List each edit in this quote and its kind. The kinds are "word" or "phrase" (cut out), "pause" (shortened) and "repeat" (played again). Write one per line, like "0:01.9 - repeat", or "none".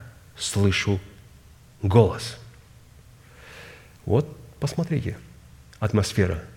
none